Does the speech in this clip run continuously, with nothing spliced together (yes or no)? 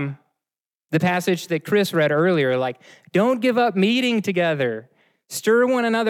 yes